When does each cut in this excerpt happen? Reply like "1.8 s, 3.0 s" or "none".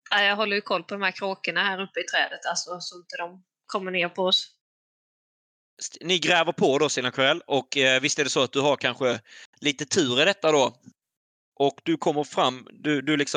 none